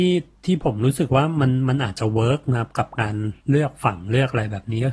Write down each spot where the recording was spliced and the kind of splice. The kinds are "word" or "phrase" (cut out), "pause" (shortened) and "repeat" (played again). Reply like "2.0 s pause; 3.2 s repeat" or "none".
3.4 s pause